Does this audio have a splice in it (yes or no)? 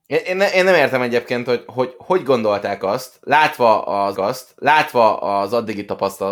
yes